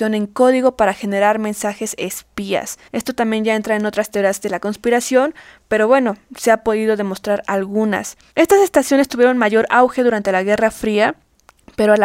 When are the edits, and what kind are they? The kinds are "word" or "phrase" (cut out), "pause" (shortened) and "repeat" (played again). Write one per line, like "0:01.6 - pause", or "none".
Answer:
0:02.9 - pause